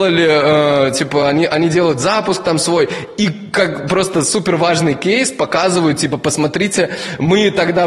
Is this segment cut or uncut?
uncut